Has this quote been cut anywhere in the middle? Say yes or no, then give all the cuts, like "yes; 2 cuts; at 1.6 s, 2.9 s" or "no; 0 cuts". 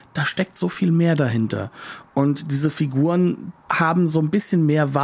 yes; 1 cut; at 3.6 s